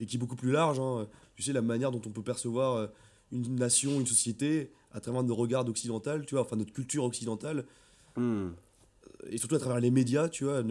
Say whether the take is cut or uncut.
uncut